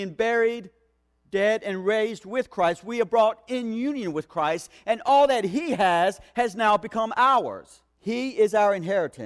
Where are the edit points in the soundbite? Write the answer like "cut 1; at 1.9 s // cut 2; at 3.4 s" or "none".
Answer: cut 1; at 7.9 s